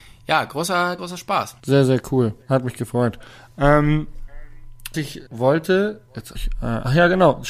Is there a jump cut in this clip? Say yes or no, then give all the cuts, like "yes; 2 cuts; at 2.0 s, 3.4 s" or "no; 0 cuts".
yes; 6 cuts; at 1.0 s, 1.6 s, 2.4 s, 4.9 s, 5.3 s, 6.3 s